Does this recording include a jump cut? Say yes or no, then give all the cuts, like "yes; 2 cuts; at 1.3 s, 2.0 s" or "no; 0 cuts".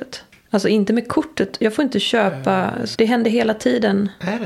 yes; 1 cut; at 2.9 s